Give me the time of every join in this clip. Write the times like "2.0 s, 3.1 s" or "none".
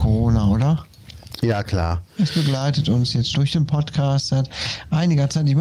3.3 s